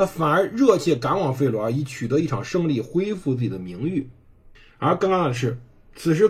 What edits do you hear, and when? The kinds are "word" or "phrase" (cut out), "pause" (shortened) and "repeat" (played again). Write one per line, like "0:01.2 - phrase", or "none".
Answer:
0:04.6 - pause